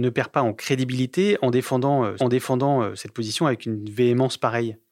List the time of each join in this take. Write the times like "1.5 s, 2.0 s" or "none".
2.2 s